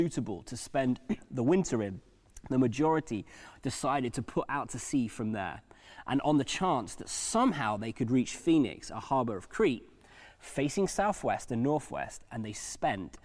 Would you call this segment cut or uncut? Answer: uncut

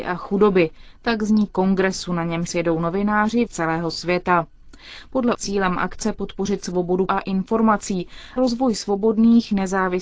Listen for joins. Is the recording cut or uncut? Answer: cut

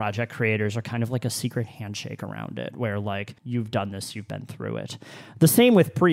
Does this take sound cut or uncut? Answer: cut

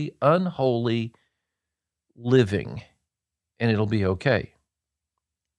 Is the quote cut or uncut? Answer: uncut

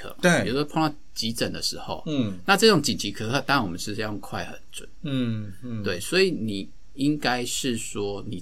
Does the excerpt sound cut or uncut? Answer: uncut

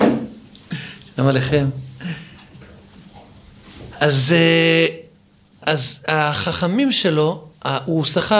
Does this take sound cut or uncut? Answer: uncut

